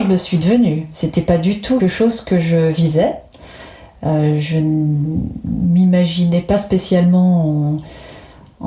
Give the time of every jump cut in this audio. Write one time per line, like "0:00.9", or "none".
0:01.8